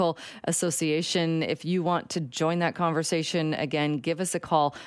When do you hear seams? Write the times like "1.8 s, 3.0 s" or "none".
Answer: none